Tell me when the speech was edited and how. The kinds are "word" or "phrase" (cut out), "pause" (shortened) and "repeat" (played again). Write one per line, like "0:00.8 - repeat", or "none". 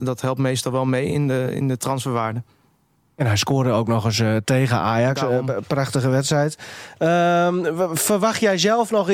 none